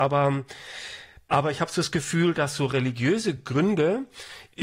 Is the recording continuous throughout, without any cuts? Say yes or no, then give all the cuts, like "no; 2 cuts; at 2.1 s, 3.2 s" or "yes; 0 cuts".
yes; 0 cuts